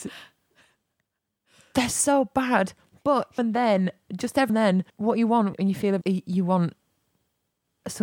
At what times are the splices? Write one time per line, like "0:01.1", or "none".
0:03.4
0:04.5
0:04.9
0:05.5
0:06.0